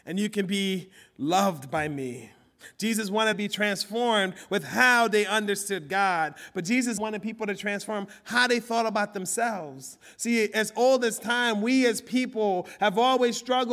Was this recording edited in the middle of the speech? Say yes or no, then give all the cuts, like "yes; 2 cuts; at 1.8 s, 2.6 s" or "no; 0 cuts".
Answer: yes; 2 cuts; at 3.3 s, 7.0 s